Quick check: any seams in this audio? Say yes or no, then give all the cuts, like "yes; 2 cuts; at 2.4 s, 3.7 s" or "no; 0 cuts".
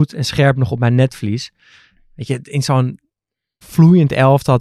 yes; 1 cut; at 3.6 s